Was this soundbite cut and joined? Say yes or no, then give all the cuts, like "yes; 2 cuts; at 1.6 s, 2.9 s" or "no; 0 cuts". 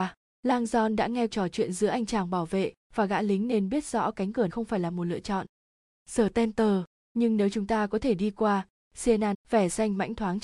yes; 3 cuts; at 1.3 s, 4.5 s, 9.3 s